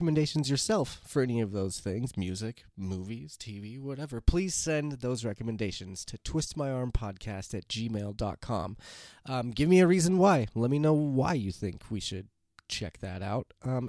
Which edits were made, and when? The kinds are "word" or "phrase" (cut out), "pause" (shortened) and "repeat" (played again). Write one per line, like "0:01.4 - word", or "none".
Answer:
none